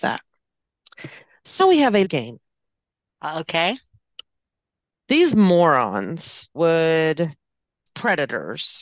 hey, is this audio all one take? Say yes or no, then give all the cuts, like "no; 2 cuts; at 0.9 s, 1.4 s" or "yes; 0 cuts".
no; 4 cuts; at 1.6 s, 2.0 s, 6.5 s, 7.9 s